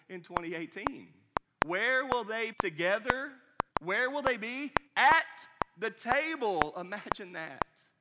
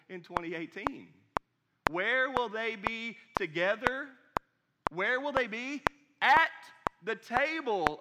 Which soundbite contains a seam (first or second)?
first